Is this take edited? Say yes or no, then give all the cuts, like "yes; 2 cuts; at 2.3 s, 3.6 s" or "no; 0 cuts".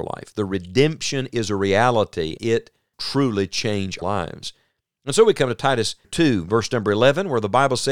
yes; 4 cuts; at 2.4 s, 2.9 s, 4.0 s, 6.0 s